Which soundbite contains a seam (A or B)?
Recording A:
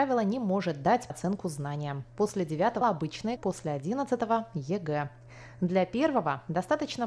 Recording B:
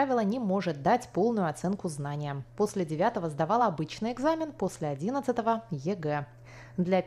A